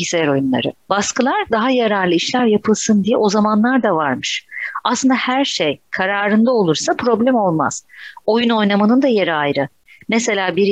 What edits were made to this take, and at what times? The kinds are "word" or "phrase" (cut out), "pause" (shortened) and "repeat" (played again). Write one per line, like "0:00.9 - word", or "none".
none